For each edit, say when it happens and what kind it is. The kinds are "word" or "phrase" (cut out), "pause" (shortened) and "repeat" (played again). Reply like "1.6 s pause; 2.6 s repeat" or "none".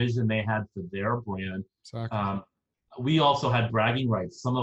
none